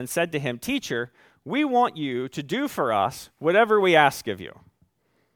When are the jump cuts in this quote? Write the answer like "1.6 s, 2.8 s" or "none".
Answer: none